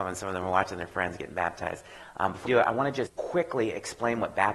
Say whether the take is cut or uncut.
cut